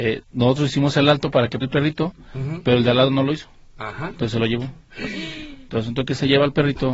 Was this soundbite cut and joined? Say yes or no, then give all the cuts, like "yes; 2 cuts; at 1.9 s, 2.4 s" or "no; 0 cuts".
yes; 1 cut; at 1.6 s